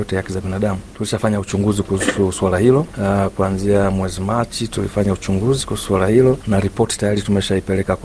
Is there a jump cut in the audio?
no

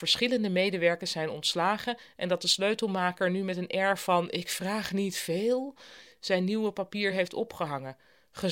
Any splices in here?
no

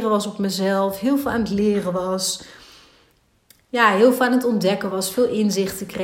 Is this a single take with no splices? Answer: yes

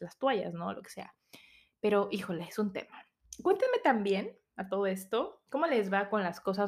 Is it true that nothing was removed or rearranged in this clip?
yes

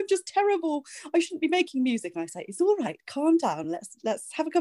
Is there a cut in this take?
no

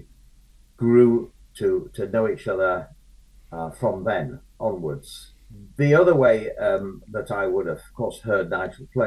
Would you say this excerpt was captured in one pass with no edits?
yes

